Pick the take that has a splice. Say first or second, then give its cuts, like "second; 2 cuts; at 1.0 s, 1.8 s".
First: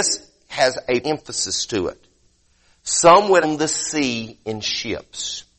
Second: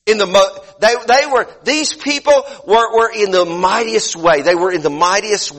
first; 2 cuts; at 1.0 s, 3.4 s